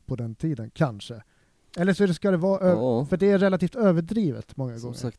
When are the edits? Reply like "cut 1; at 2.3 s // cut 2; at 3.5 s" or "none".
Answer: none

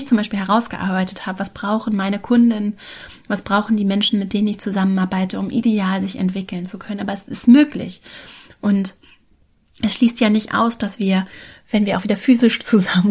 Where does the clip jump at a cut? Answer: none

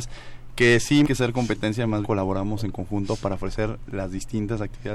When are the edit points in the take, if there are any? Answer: cut 1; at 1.0 s // cut 2; at 2.0 s

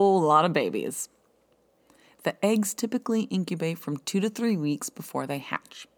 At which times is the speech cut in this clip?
none

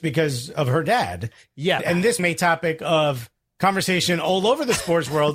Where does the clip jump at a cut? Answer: cut 1; at 1.8 s // cut 2; at 2.2 s

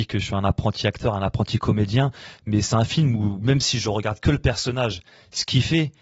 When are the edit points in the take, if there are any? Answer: none

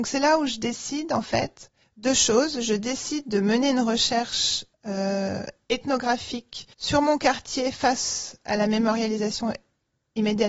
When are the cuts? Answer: cut 1; at 1.8 s // cut 2; at 4.7 s // cut 3; at 6.7 s

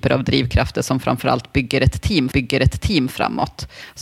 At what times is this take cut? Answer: cut 1; at 2.3 s

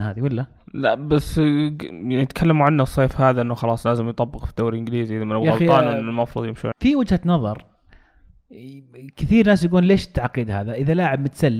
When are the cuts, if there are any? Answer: cut 1; at 6.7 s

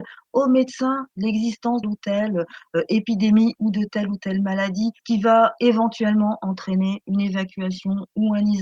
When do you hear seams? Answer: cut 1; at 1.8 s // cut 2; at 5.0 s

